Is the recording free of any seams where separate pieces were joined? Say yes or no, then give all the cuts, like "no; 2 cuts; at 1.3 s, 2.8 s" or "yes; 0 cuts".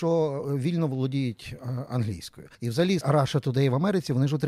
no; 2 cuts; at 2.5 s, 3.0 s